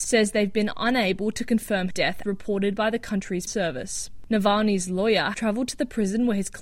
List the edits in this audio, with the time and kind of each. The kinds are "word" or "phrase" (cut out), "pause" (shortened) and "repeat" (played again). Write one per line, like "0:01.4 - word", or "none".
0:01.9 - word
0:02.2 - word
0:03.5 - word
0:05.3 - word